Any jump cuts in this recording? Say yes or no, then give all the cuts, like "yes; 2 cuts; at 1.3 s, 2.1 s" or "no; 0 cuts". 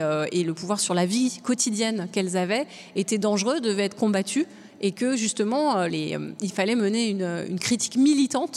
yes; 1 cut; at 5.9 s